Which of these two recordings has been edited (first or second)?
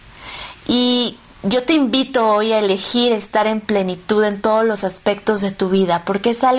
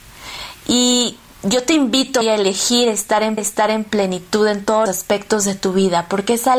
second